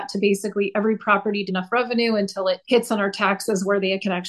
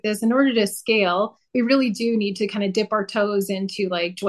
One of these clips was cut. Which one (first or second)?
first